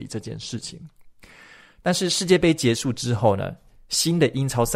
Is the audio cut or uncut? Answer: uncut